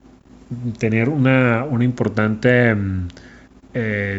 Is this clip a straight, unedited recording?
yes; 0 cuts

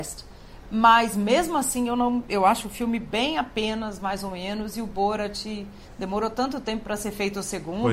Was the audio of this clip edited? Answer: no; 0 cuts

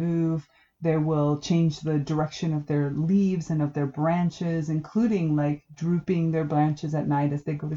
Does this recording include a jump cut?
no; 0 cuts

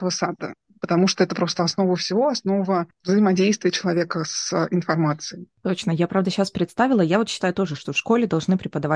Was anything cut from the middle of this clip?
no; 0 cuts

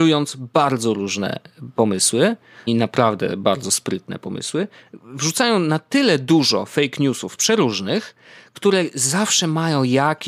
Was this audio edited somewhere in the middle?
yes; 1 cut; at 2.7 s

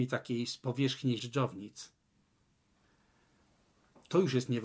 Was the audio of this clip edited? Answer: yes; 1 cut; at 1.2 s

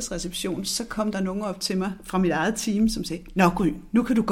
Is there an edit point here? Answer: no; 0 cuts

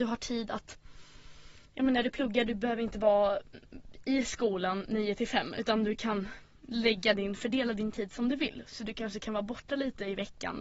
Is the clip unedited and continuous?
yes; 0 cuts

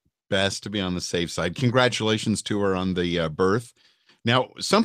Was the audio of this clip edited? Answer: no; 0 cuts

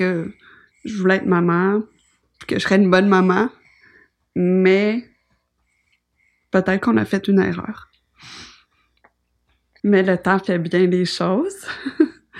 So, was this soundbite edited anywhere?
no; 0 cuts

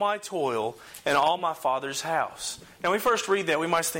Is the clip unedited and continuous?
yes; 0 cuts

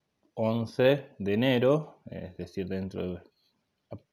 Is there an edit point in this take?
no; 0 cuts

